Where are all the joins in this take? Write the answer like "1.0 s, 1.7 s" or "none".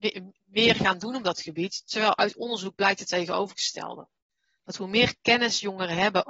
none